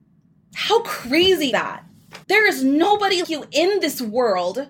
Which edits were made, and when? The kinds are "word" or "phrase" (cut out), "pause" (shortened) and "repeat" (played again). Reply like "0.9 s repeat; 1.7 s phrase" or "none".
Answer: 1.5 s word; 2.2 s pause; 3.2 s word